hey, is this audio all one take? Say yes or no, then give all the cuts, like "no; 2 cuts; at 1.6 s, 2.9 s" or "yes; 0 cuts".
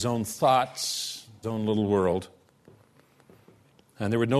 no; 1 cut; at 1.4 s